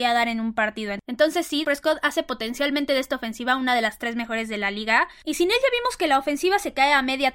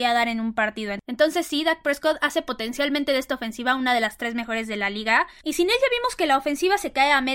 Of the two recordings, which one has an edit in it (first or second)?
first